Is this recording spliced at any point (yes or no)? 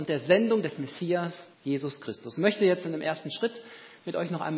yes